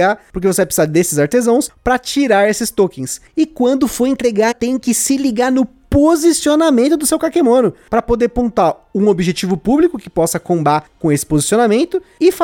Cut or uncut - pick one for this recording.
cut